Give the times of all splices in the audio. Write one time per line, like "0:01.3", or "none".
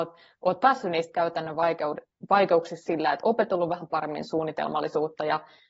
0:02.9

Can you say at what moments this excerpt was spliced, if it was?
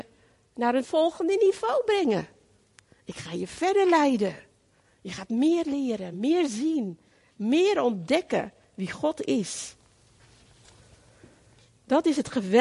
none

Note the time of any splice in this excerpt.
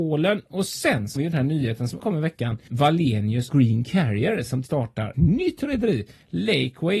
0:01.2
0:02.0
0:02.7
0:03.5
0:04.7
0:05.1

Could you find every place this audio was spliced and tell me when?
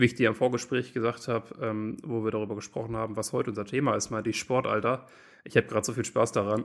none

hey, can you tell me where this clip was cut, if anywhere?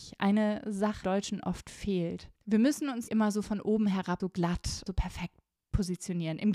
0:01.0
0:02.4
0:03.1
0:04.2
0:04.9
0:05.6

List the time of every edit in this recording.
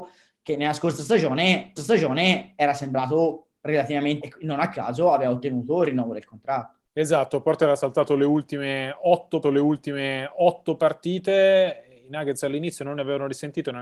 0:01.8
0:04.2
0:06.9
0:09.4

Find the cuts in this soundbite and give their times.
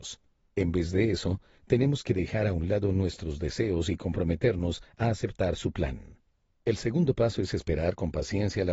none

